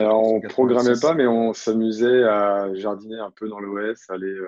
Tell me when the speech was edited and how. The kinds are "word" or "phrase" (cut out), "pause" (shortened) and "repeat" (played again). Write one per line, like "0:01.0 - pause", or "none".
none